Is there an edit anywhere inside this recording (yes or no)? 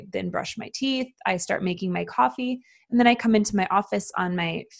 no